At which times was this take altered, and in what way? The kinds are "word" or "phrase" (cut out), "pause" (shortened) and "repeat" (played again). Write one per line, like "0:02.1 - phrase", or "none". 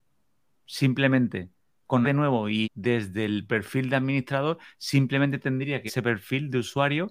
0:02.0 - word
0:02.6 - word
0:05.9 - word